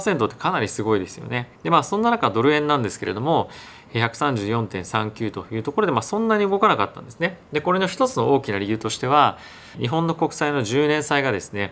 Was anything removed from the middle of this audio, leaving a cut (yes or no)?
yes